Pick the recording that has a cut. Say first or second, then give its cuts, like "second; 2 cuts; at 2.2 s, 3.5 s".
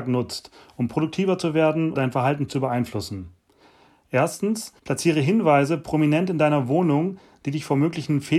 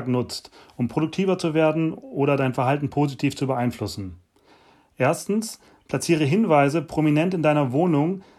first; 3 cuts; at 1.9 s, 2.5 s, 4.8 s